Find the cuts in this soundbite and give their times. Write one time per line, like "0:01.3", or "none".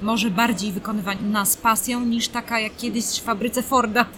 none